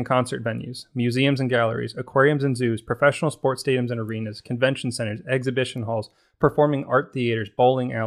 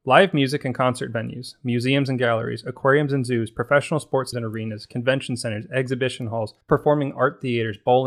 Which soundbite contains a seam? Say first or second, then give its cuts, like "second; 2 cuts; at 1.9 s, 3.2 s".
second; 2 cuts; at 4.3 s, 6.6 s